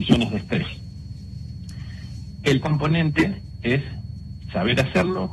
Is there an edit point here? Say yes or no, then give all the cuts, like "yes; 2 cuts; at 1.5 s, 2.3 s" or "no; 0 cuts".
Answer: yes; 1 cut; at 2.6 s